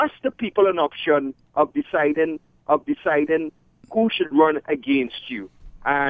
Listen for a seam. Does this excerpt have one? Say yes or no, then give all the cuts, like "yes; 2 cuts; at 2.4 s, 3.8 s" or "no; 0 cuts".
yes; 1 cut; at 2.6 s